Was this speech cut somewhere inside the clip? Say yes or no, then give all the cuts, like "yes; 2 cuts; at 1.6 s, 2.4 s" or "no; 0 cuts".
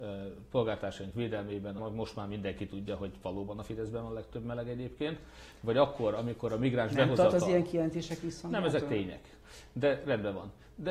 yes; 1 cut; at 1.8 s